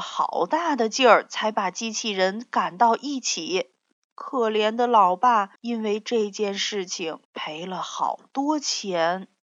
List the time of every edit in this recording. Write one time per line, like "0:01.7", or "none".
0:03.9
0:05.6
0:07.2